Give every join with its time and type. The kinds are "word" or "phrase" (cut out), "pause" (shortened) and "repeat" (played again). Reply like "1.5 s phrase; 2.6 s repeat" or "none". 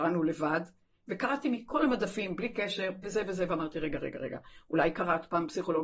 3.0 s word